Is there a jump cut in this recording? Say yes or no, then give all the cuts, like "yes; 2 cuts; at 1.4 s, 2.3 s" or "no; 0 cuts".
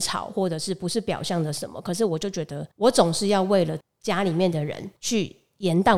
yes; 2 cuts; at 2.7 s, 5.0 s